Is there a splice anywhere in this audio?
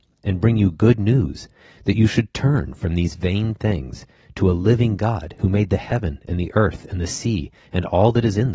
no; 0 cuts

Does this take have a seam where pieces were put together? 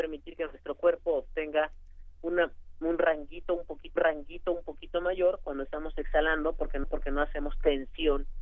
yes; 2 cuts; at 4.0 s, 6.8 s

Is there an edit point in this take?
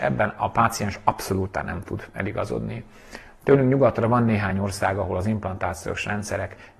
no; 0 cuts

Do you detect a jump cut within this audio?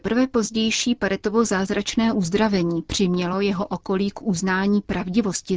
no; 0 cuts

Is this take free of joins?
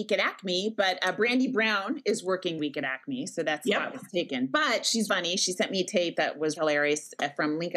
no; 3 cuts; at 2.6 s, 5.1 s, 6.6 s

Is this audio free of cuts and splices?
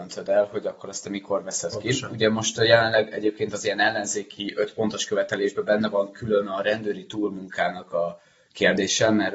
yes; 0 cuts

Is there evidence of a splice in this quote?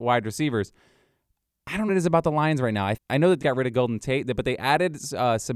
yes; 3 cuts; at 1.9 s, 3.0 s, 3.4 s

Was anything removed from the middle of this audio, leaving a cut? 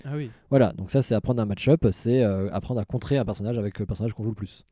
no; 0 cuts

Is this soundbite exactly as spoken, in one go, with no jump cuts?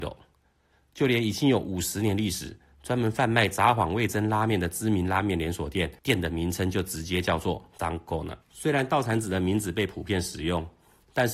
no; 3 cuts; at 6.0 s, 7.8 s, 8.4 s

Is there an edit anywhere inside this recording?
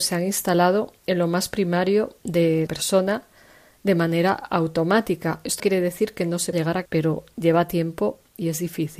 yes; 4 cuts; at 2.7 s, 5.6 s, 6.5 s, 6.9 s

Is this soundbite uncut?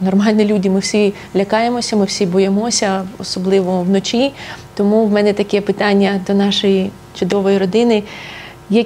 yes; 0 cuts

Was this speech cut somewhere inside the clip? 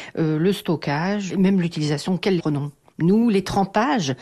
yes; 2 cuts; at 1.3 s, 2.4 s

